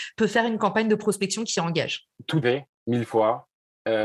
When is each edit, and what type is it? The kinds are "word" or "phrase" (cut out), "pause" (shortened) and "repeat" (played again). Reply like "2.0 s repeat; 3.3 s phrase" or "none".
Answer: 2.4 s word